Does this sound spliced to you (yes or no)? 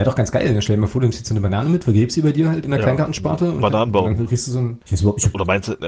yes